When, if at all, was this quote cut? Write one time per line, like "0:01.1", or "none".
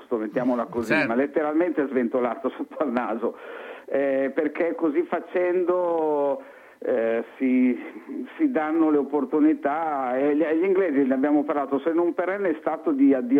none